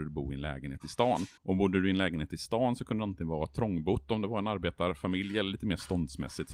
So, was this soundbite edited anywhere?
yes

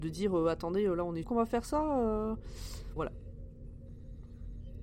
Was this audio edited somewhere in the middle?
yes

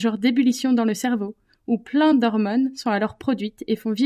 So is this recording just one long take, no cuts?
yes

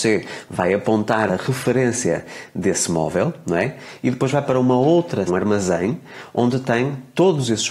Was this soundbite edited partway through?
yes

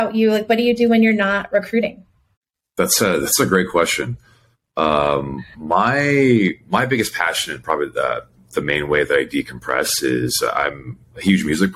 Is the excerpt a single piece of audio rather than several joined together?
yes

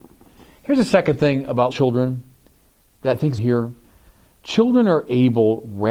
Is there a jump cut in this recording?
yes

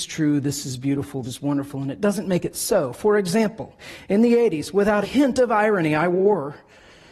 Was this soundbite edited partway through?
yes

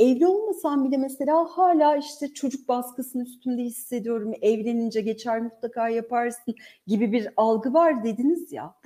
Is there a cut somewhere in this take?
no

